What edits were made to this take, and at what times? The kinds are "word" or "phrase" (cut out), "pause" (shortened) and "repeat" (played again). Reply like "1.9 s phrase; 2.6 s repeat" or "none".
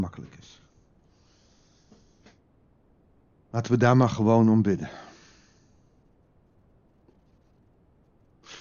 none